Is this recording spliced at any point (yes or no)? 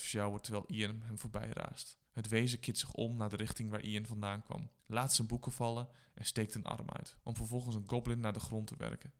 yes